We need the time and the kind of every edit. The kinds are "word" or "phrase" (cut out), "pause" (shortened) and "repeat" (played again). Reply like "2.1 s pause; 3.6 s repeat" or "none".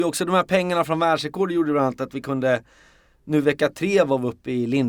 none